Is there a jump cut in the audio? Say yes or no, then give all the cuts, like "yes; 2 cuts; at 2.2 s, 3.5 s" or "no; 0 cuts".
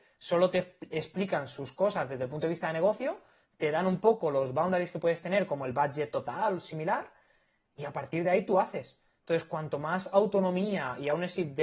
no; 0 cuts